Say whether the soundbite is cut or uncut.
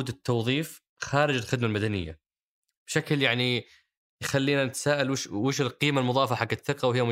uncut